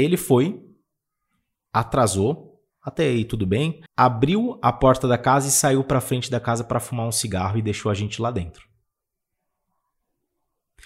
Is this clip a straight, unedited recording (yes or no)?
no